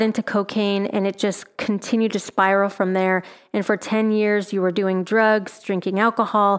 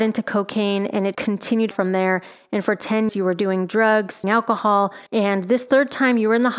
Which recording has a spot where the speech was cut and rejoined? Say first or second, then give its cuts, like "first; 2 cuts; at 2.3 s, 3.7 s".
second; 5 cuts; at 1.1 s, 1.7 s, 3.1 s, 4.2 s, 5.1 s